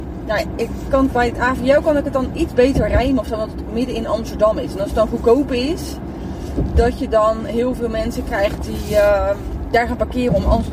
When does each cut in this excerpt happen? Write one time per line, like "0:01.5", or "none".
none